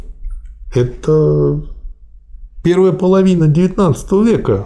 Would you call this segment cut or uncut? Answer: uncut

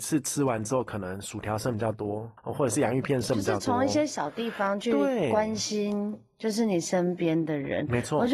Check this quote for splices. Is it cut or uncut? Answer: cut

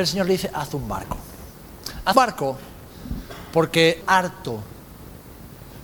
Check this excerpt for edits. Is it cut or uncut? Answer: cut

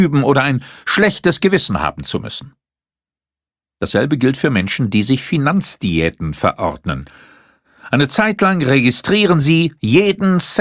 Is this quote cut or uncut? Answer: uncut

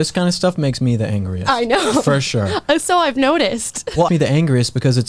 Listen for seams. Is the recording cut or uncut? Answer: cut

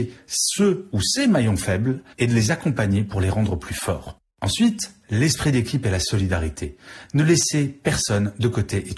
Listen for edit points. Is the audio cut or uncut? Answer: cut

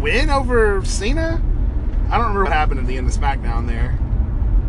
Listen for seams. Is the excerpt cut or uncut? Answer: cut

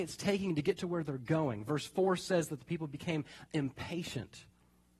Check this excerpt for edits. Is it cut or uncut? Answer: uncut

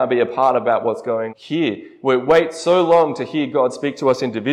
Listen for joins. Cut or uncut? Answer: cut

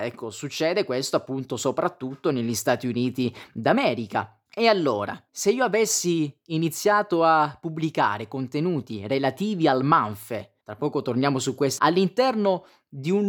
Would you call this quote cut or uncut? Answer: cut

